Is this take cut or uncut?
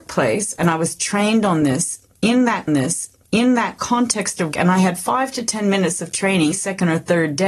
cut